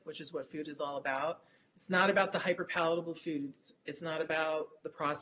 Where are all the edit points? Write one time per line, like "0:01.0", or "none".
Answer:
none

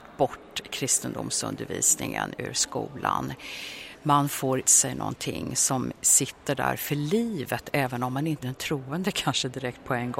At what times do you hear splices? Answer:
0:04.6
0:08.4

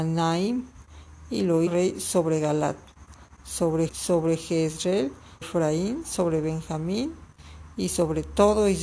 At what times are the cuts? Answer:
0:01.7
0:03.9
0:05.4

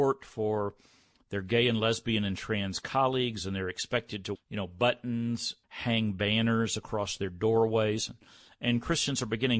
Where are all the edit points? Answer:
0:04.4
0:05.6

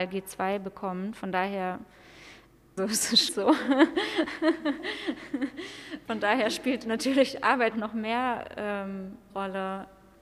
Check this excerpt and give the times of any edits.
0:02.8
0:03.3
0:06.1
0:07.7
0:09.3

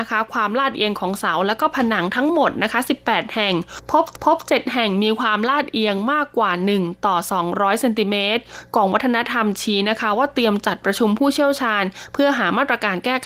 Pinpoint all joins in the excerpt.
0:04.2

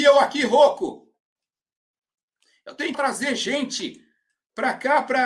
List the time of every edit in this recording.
0:02.9

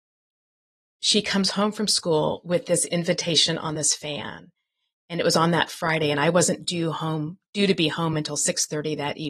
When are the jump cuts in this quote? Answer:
none

